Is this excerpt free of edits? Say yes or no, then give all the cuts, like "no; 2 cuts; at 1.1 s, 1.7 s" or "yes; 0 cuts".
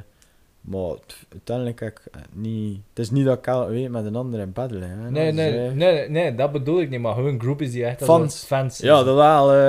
yes; 0 cuts